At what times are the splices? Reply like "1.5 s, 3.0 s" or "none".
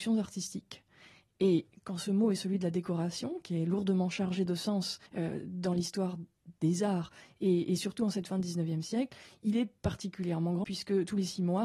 5.1 s, 10.6 s